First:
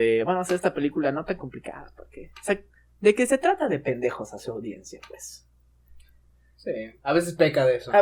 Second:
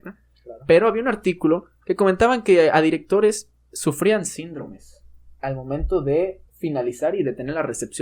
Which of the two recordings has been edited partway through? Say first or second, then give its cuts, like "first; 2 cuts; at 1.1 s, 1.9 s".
second; 1 cut; at 6.5 s